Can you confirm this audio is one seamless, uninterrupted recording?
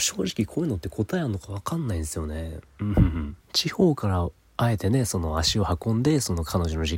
no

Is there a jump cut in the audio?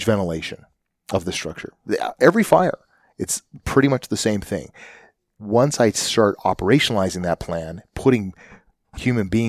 no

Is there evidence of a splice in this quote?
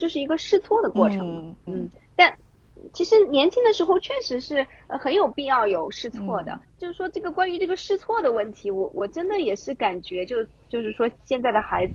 yes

